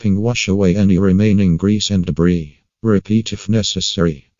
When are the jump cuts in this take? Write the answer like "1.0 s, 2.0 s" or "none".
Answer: none

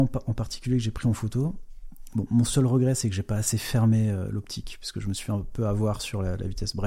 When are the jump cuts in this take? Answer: none

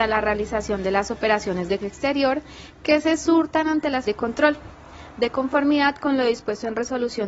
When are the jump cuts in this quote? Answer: 1.8 s, 4.0 s

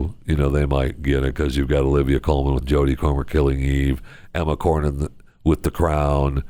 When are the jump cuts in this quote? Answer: 2.6 s

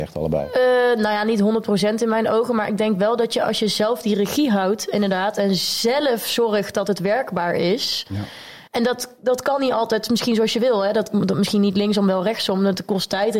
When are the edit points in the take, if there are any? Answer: 8.7 s

